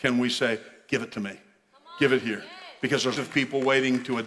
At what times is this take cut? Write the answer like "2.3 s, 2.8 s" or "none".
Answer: 3.2 s